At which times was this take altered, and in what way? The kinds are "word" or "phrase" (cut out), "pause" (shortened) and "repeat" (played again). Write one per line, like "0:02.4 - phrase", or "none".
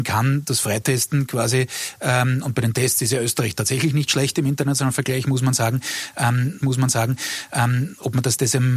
0:06.6 - repeat